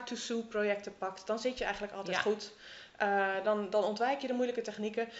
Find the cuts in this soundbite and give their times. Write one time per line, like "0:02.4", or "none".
none